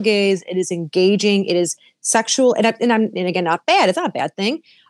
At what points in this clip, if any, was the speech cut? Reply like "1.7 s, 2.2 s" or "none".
none